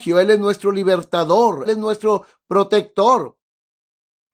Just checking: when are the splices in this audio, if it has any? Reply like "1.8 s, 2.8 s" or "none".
1.7 s